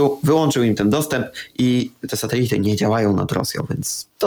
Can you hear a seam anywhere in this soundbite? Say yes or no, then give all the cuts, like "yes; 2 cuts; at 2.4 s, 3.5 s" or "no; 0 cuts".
no; 0 cuts